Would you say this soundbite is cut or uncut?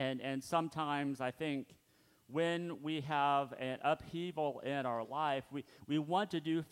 uncut